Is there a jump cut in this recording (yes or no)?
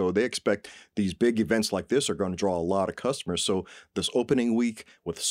no